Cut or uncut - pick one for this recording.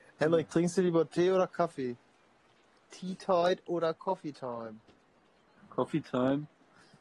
uncut